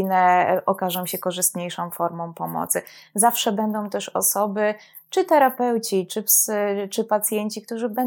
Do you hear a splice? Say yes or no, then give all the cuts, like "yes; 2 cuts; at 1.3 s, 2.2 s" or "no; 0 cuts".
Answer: no; 0 cuts